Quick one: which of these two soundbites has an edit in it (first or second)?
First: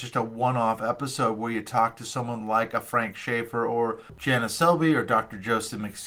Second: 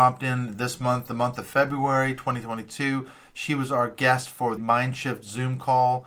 second